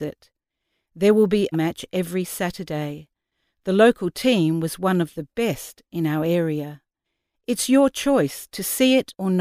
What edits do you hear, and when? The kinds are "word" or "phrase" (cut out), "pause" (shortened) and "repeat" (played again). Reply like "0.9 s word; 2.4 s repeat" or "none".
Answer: 1.5 s phrase